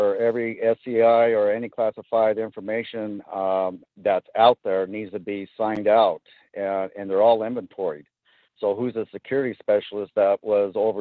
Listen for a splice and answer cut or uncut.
uncut